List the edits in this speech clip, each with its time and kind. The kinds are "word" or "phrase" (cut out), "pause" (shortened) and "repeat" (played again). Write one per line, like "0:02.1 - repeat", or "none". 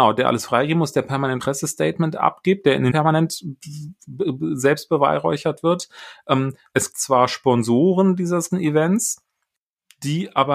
0:01.4 - word
0:02.9 - word
0:06.9 - word
0:08.5 - word